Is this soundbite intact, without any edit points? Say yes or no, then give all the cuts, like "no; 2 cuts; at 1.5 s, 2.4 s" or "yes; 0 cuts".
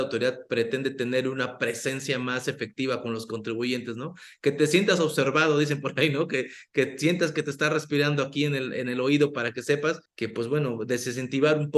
no; 1 cut; at 10.1 s